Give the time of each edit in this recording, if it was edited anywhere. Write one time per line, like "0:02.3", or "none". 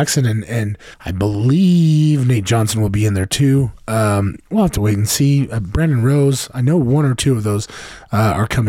0:00.9